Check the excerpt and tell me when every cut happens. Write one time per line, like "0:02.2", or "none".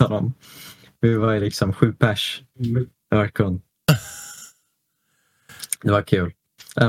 none